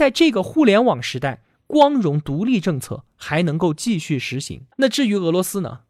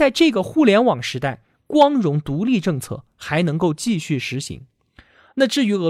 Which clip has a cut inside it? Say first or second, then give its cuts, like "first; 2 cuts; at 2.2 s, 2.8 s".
first; 1 cut; at 4.7 s